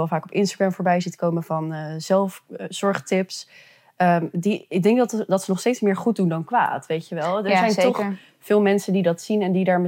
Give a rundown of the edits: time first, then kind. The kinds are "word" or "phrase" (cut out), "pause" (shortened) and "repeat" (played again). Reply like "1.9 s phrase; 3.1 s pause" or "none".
none

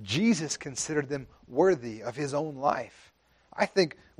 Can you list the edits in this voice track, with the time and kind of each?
none

